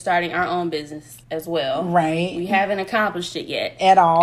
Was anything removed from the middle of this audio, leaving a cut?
yes; 1 cut; at 1.2 s

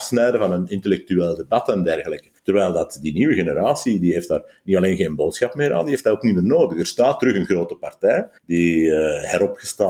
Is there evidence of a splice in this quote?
yes; 2 cuts; at 2.4 s, 8.4 s

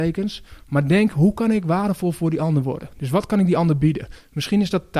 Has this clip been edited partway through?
no; 0 cuts

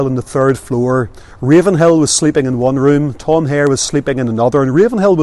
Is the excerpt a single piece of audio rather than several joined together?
yes; 0 cuts

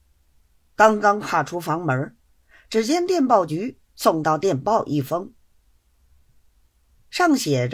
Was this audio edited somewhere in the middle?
no; 0 cuts

